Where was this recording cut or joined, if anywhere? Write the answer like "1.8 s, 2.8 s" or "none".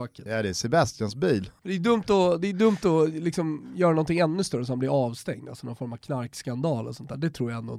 none